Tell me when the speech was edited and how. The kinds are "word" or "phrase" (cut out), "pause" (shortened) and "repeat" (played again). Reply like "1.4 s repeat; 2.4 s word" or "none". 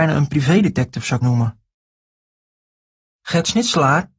1.2 s word